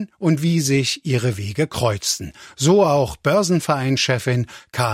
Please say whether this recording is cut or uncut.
uncut